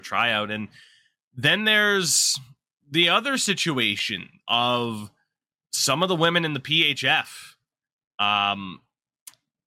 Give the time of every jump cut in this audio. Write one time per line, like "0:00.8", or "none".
none